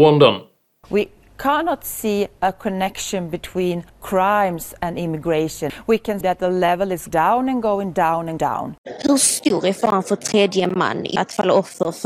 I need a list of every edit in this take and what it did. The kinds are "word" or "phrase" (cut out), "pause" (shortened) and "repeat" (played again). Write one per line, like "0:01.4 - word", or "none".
0:03.9 - word
0:06.2 - word
0:07.1 - word
0:08.4 - word
0:11.2 - word